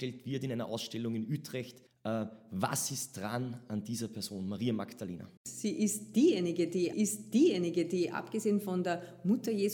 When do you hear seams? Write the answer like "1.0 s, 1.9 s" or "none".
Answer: 1.9 s, 5.4 s, 6.9 s